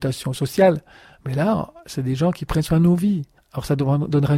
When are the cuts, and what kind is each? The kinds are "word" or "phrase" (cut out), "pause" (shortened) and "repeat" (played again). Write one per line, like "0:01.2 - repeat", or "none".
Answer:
0:03.4 - pause